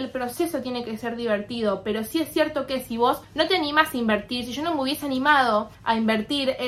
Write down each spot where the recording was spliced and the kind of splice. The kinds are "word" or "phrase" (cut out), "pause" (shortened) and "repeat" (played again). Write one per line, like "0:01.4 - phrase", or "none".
0:03.2 - pause
0:05.7 - pause